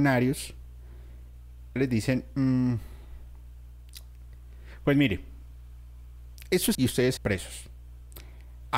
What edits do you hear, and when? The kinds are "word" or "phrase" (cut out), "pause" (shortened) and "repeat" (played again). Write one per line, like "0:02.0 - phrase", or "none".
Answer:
0:01.8 - phrase
0:06.7 - word
0:07.2 - phrase